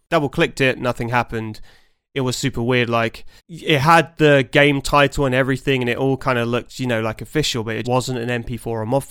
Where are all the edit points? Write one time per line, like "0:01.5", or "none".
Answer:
0:03.4
0:07.8